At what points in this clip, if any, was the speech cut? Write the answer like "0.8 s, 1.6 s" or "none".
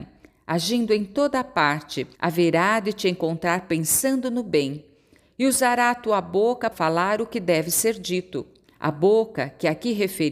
2.1 s, 6.7 s, 8.6 s